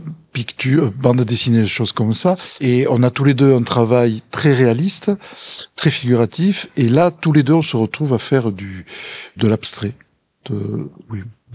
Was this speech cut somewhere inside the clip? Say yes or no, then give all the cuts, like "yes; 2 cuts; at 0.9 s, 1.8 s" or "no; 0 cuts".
yes; 1 cut; at 9.4 s